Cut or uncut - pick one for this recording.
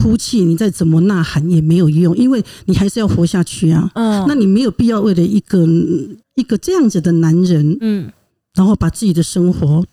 cut